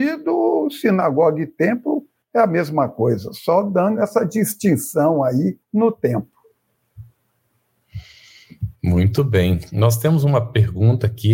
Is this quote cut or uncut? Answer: cut